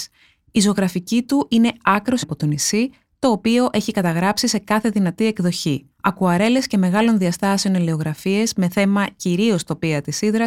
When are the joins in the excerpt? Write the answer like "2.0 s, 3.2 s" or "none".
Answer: 2.2 s, 5.9 s

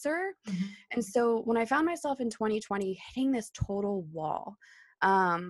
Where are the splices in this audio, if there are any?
none

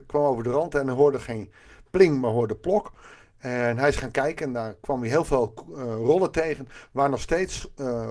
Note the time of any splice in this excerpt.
none

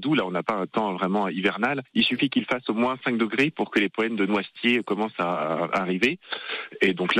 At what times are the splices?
none

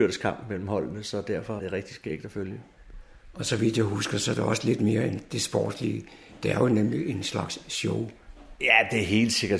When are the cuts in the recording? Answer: 1.6 s

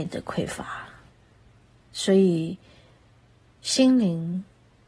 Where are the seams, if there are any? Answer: 1.1 s

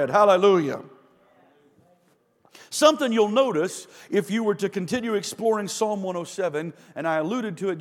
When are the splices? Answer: none

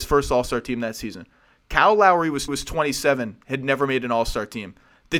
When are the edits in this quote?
2.5 s

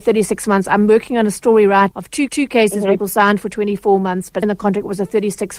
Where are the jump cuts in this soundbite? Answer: 1.9 s, 2.3 s, 3.0 s, 4.4 s

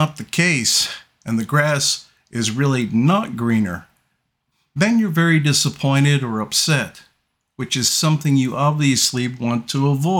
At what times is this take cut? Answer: none

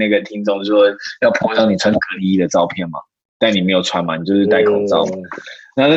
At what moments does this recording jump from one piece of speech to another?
none

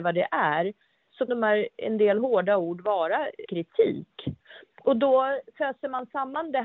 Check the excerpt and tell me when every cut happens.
1.3 s, 3.5 s

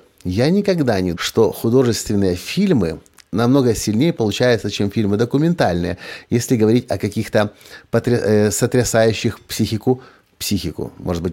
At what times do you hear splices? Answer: 1.1 s

